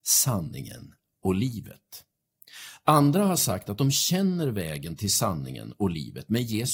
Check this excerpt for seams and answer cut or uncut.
uncut